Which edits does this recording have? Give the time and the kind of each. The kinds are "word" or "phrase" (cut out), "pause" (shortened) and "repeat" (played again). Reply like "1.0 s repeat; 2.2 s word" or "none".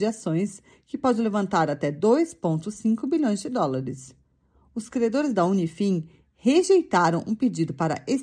none

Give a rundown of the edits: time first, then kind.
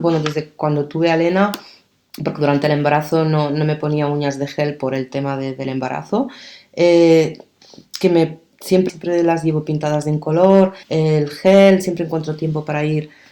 8.9 s phrase; 10.8 s pause

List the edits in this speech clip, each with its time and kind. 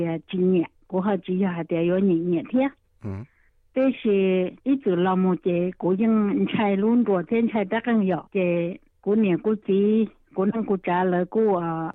3.5 s pause; 4.6 s pause; 8.3 s pause

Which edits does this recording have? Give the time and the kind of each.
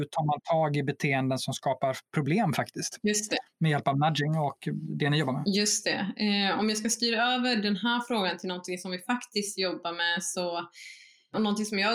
none

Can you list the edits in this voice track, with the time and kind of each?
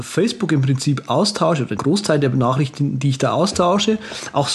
1.8 s word

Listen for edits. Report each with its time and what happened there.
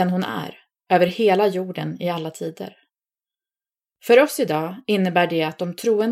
none

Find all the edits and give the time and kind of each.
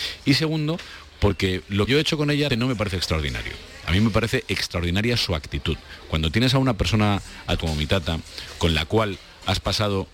1.9 s word; 2.5 s word; 7.6 s word

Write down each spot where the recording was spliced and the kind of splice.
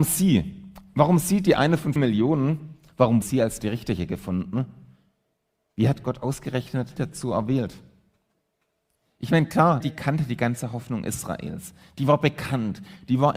2.0 s word; 3.2 s word; 7.0 s word; 9.8 s word

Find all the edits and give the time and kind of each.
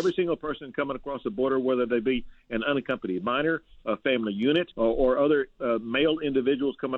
4.7 s pause

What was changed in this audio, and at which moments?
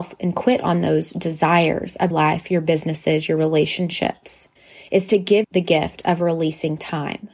2.1 s word; 4.6 s pause; 5.4 s word

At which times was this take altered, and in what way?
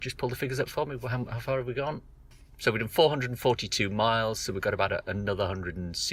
none

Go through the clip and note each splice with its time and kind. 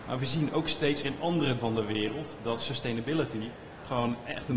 1.0 s word; 1.6 s word

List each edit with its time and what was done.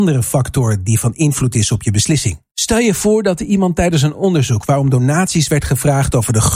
2.5 s pause

